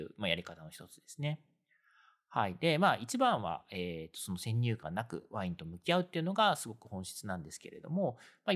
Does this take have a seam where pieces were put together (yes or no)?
no